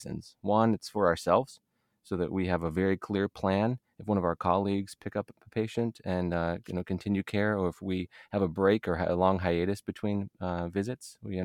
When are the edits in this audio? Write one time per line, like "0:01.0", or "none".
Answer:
none